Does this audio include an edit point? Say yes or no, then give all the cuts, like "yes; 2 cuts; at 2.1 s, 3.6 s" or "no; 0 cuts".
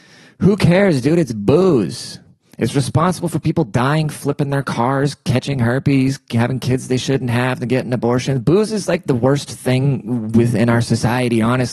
no; 0 cuts